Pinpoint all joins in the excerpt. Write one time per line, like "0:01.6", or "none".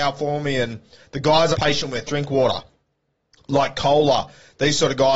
0:01.5
0:02.1